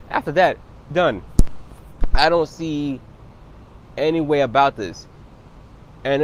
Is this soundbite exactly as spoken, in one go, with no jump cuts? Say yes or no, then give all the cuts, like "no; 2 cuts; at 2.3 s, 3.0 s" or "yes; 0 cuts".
no; 1 cut; at 0.9 s